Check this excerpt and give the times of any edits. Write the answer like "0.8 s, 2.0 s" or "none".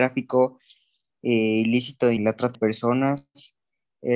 2.2 s, 2.5 s